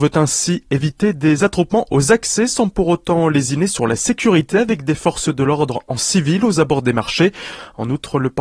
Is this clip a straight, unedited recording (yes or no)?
yes